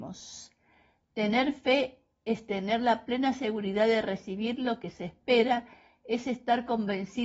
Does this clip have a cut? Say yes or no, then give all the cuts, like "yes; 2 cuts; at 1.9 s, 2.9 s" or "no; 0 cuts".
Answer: no; 0 cuts